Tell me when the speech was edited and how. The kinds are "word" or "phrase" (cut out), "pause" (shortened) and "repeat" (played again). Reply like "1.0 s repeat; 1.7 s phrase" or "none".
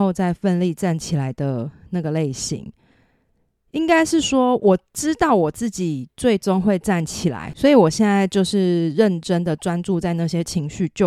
none